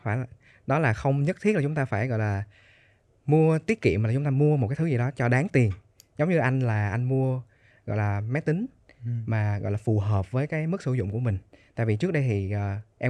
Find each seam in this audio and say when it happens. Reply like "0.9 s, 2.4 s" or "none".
none